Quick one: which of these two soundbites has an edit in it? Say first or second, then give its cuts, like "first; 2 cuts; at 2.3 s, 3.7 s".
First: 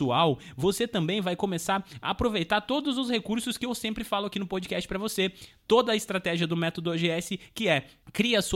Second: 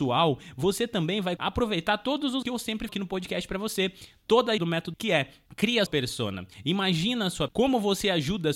second; 7 cuts; at 1.4 s, 2.4 s, 2.9 s, 4.6 s, 4.9 s, 5.9 s, 7.5 s